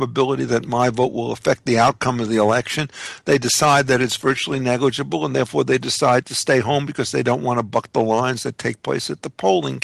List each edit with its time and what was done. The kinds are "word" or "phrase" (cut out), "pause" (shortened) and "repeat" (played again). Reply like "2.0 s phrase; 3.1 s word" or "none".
none